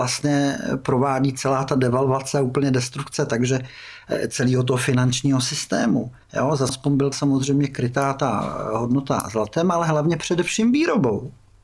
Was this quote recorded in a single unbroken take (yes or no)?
no